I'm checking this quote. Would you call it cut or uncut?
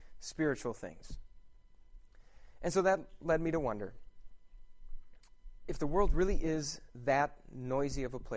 uncut